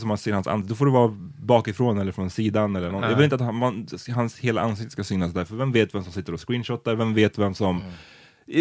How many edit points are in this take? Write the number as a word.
zero